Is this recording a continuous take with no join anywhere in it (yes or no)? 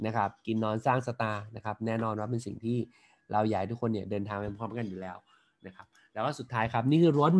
yes